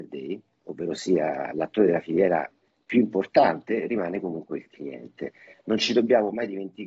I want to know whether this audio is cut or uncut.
uncut